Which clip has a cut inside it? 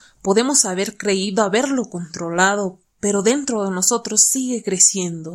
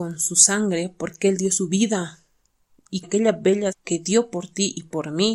second; 2 cuts; at 3.0 s, 3.7 s

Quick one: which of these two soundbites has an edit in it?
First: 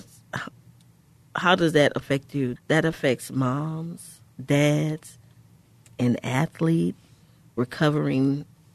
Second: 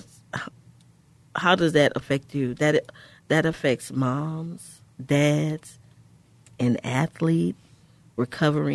first; 1 cut; at 2.6 s

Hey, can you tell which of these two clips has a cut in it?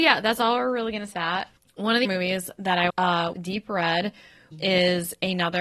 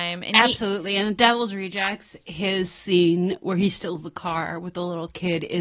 first; 5 cuts; at 1.1 s, 2.0 s, 2.9 s, 3.3 s, 4.5 s

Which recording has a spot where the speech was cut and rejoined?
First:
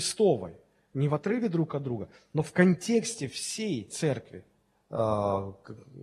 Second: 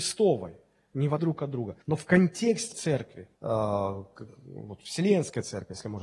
second; 4 cuts; at 1.2 s, 1.8 s, 2.7 s, 3.3 s

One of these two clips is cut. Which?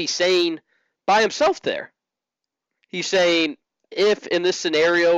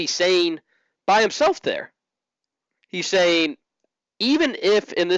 first; 1 cut; at 3.9 s

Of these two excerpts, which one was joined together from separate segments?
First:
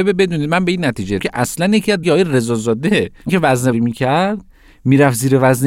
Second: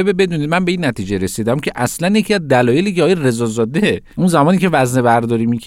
first; 4 cuts; at 1.2 s, 2.0 s, 3.3 s, 3.7 s

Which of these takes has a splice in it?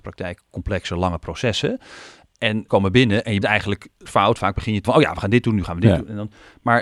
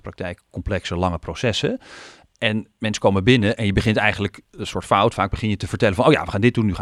first; 4 cuts; at 2.7 s, 3.4 s, 4.1 s, 4.8 s

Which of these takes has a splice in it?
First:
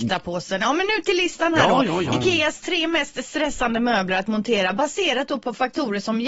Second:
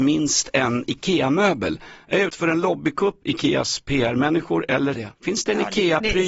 second; 3 cuts; at 2.3 s, 3.2 s, 4.9 s

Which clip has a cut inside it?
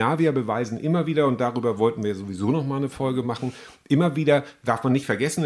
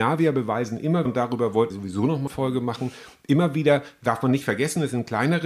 second; 3 cuts; at 1.1 s, 1.7 s, 2.3 s

